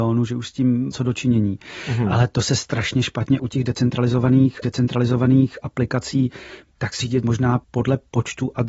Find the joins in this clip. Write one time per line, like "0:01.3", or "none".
0:00.9
0:03.4
0:04.6
0:07.0
0:07.6

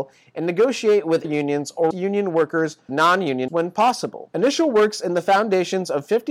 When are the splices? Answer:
0:01.2
0:01.9
0:02.9
0:03.5

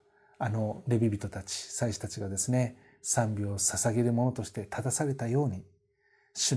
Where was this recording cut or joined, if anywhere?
none

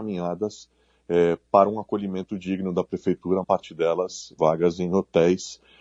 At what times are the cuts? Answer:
0:03.4
0:04.4

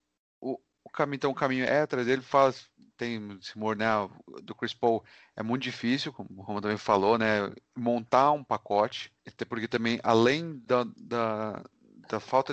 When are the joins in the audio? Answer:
0:07.7
0:09.2

